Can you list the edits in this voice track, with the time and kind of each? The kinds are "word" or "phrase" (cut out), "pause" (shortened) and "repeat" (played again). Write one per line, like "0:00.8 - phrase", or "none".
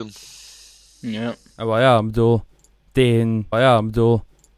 0:03.5 - repeat